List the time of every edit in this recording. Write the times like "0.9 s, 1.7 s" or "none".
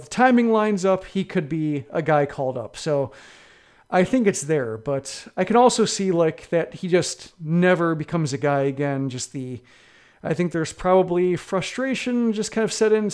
none